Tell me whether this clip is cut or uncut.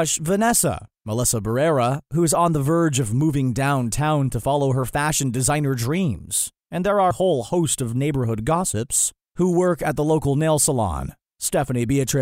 cut